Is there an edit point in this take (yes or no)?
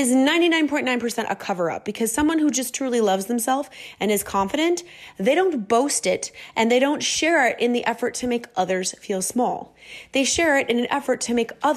no